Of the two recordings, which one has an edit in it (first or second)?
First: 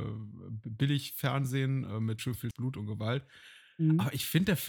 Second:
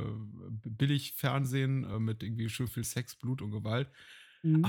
first